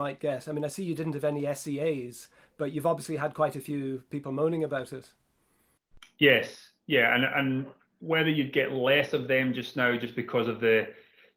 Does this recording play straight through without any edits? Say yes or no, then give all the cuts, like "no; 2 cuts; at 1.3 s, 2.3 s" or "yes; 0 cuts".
yes; 0 cuts